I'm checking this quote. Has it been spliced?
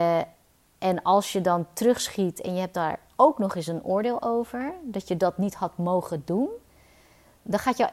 no; 0 cuts

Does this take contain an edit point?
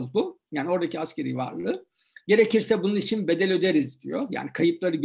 no; 0 cuts

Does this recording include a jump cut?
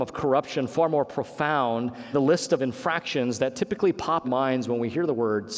yes; 2 cuts; at 2.1 s, 4.2 s

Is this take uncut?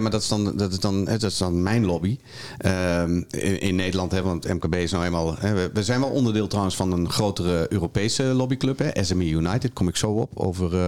yes; 0 cuts

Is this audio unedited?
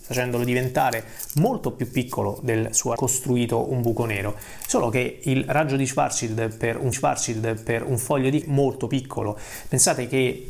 no; 3 cuts; at 3.0 s, 6.9 s, 8.4 s

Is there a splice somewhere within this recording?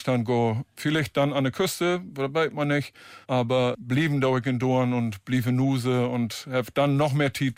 yes; 1 cut; at 3.2 s

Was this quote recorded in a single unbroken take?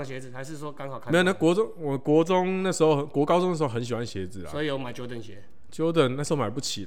yes; 0 cuts

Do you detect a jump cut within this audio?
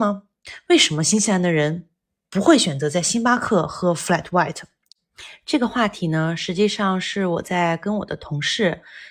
no; 0 cuts

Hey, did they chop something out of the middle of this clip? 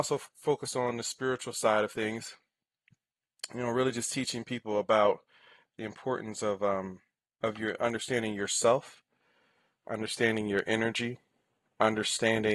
no; 0 cuts

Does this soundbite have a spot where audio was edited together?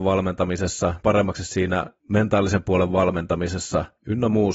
yes; 1 cut; at 1.0 s

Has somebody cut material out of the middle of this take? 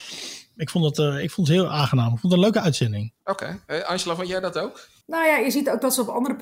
yes; 2 cuts; at 3.2 s, 5.0 s

